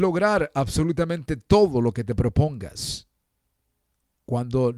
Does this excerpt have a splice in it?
no; 0 cuts

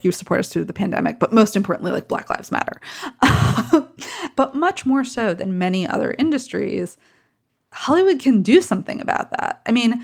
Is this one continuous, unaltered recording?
yes; 0 cuts

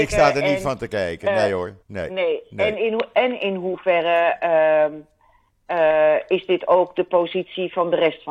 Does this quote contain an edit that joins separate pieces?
yes; 1 cut; at 1.8 s

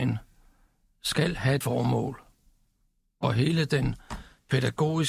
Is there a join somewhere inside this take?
yes; 1 cut; at 1.6 s

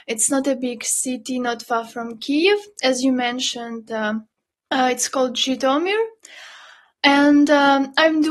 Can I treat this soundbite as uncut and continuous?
yes; 0 cuts

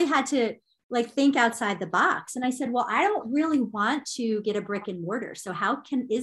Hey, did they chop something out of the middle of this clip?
no; 0 cuts

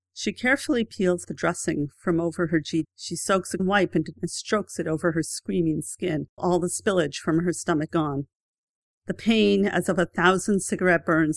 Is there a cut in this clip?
yes; 6 cuts; at 1.2 s, 2.8 s, 3.6 s, 4.1 s, 6.4 s, 7.9 s

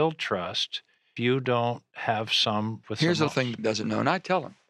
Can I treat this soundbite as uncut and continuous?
no; 4 cuts; at 1.2 s, 2.8 s, 3.3 s, 3.6 s

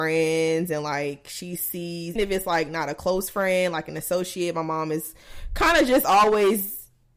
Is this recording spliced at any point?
yes; 1 cut; at 2.2 s

